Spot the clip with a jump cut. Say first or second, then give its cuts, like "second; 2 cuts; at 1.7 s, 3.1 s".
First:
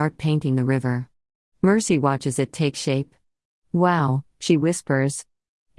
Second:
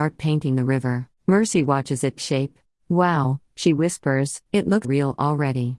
second; 5 cuts; at 1.2 s, 2.2 s, 2.6 s, 4.5 s, 4.8 s